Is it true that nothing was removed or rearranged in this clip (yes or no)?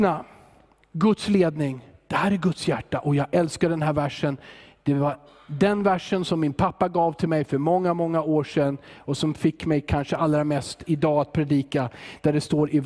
yes